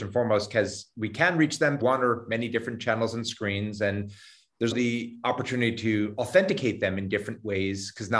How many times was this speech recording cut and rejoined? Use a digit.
2